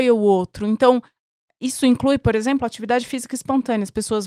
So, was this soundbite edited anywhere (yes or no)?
no